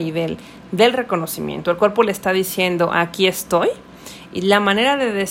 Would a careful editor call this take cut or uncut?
uncut